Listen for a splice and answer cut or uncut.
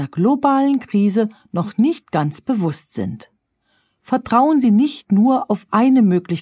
uncut